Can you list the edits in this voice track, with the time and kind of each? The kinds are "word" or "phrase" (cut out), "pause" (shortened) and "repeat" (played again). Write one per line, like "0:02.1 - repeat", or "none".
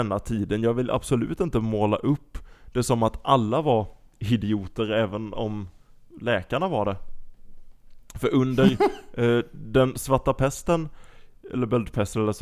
0:05.3 - word